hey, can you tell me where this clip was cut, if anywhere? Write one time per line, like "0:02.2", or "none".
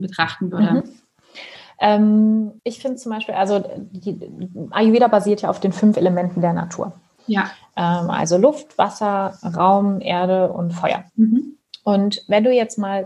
0:02.6
0:11.1